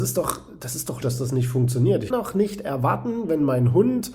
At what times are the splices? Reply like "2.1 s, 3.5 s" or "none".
1.0 s, 2.1 s